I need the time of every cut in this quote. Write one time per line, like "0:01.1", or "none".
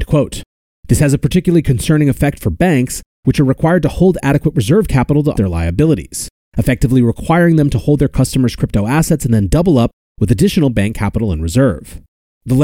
0:05.3
0:06.3